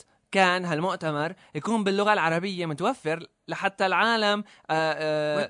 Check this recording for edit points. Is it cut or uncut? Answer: uncut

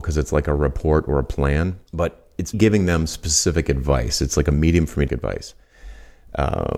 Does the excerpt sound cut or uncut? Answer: cut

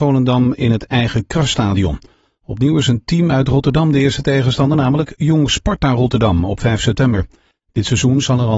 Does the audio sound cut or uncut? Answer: uncut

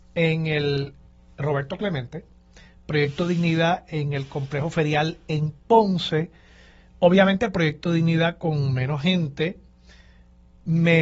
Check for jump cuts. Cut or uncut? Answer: uncut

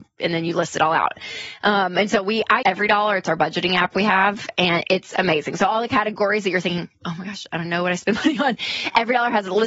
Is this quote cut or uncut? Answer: cut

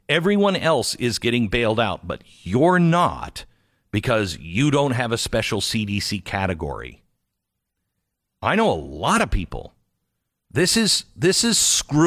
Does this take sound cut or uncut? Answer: uncut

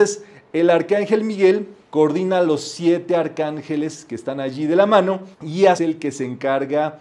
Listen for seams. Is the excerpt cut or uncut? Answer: cut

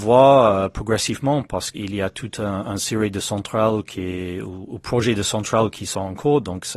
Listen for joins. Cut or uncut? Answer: cut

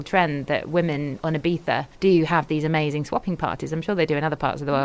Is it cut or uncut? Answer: cut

